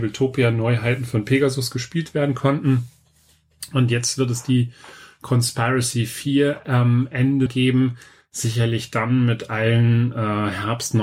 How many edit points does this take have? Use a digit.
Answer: 1